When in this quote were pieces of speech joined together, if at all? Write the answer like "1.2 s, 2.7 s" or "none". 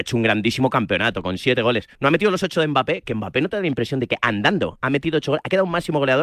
1.9 s

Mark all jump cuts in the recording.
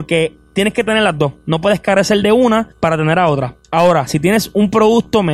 2.7 s

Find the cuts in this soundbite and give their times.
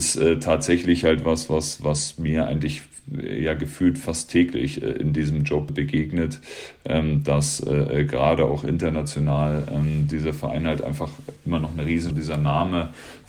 5.7 s, 12.1 s

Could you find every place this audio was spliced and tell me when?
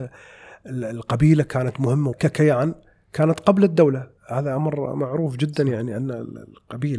2.1 s, 4.2 s

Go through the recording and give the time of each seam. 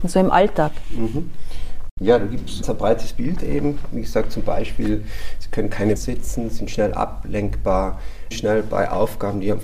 2.6 s, 6.0 s, 8.3 s

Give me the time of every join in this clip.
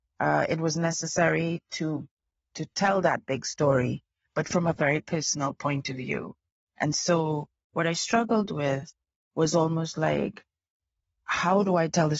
none

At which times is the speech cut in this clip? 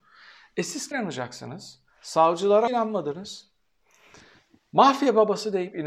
0.9 s, 2.7 s

